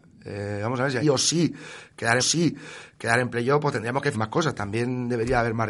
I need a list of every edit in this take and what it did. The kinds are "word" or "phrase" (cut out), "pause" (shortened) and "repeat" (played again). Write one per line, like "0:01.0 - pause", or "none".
0:01.0 - phrase
0:02.2 - repeat
0:04.1 - word

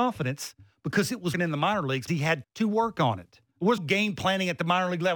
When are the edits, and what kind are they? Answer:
0:01.3 - word
0:02.1 - word
0:02.4 - word
0:03.8 - word

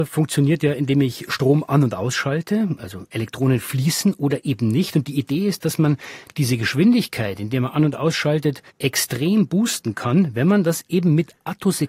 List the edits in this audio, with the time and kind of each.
0:08.7 - pause

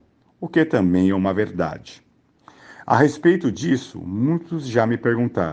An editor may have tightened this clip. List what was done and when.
none

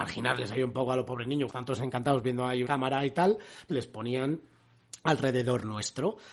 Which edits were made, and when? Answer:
0:01.5 - word
0:02.6 - word
0:03.7 - word

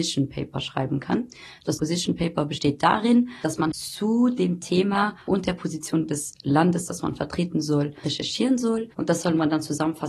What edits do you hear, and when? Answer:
0:05.2 - pause

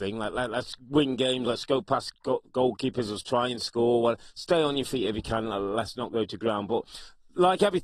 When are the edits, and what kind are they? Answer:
0:02.1 - pause

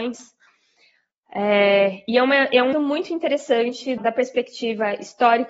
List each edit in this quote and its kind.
0:02.7 - word
0:04.0 - word

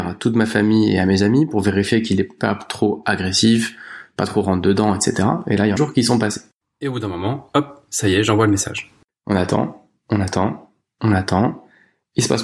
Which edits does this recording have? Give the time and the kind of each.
0:05.8 - phrase

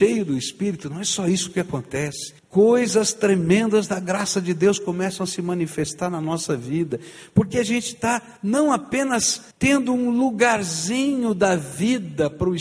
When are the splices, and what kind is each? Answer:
0:02.4 - pause
0:08.4 - pause
0:09.5 - pause

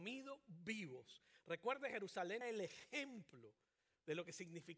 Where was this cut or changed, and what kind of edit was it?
0:02.4 - word

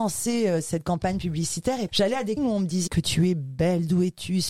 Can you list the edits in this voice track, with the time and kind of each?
0:01.9 - word
0:02.4 - word
0:02.9 - word

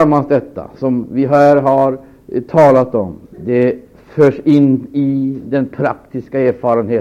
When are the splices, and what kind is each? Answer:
0:03.2 - pause

